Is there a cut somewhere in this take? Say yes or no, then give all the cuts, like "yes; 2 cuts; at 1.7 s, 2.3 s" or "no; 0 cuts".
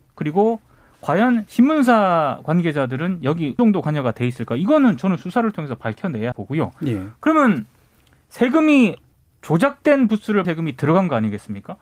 yes; 4 cuts; at 3.6 s, 6.3 s, 9.1 s, 10.4 s